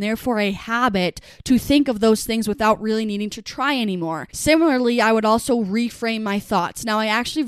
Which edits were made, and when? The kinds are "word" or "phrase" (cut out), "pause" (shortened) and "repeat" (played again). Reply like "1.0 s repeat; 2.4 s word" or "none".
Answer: 4.3 s pause